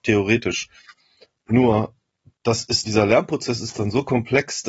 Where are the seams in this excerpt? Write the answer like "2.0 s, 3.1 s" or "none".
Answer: 2.8 s